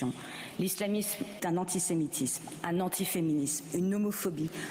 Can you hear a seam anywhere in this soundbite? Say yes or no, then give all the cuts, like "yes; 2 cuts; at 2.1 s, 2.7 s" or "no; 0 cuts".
yes; 1 cut; at 1.4 s